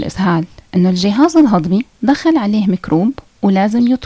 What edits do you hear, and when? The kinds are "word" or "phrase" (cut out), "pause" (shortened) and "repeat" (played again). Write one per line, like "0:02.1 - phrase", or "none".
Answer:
none